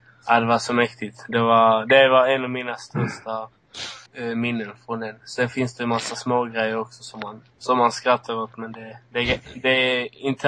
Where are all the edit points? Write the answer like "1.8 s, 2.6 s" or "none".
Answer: 4.1 s

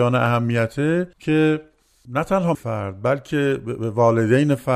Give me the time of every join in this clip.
1.1 s, 2.5 s

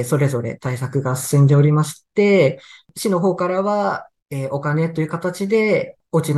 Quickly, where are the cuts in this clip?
4.2 s

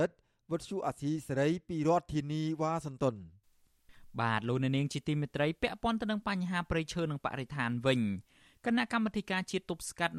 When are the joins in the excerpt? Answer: none

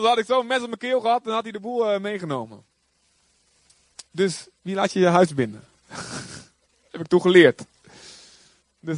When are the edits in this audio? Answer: 4.1 s

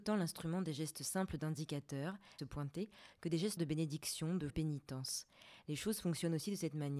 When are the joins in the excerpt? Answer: 2.4 s, 3.6 s, 4.5 s

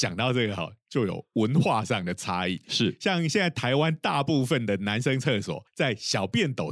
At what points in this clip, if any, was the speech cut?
5.7 s

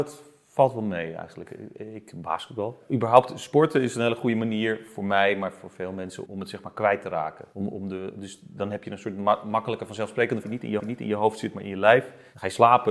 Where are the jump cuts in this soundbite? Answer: 6.3 s, 10.4 s, 10.8 s

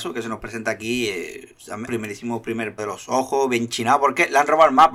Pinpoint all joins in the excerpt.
1.9 s, 2.8 s

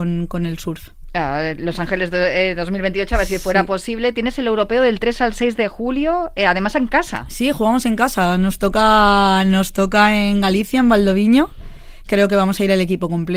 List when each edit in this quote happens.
12.1 s

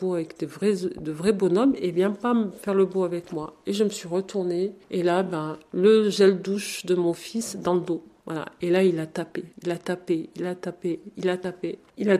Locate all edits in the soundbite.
9.5 s

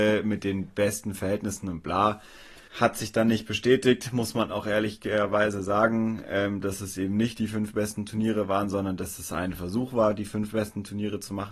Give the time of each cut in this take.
2.7 s

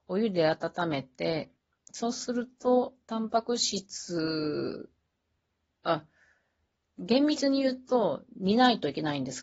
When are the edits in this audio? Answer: none

